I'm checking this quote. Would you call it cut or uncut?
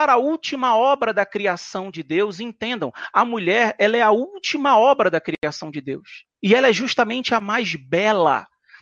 cut